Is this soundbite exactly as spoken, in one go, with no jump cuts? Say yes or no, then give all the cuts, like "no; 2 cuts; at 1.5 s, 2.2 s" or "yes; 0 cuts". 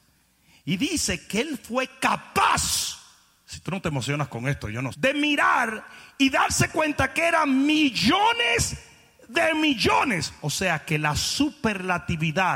no; 1 cut; at 4.9 s